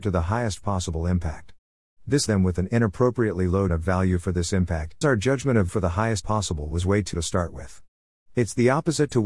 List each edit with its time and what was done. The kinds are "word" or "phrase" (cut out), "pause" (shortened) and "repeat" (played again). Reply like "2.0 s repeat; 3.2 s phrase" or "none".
2.3 s word; 3.7 s word; 5.0 s word; 5.7 s word; 6.2 s word; 7.1 s word